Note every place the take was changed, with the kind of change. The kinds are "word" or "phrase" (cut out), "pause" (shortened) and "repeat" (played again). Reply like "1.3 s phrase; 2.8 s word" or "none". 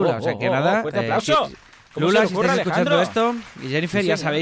none